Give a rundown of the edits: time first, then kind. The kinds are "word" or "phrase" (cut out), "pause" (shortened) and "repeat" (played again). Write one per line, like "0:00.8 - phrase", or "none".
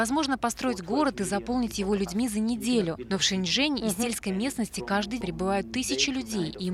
0:05.2 - word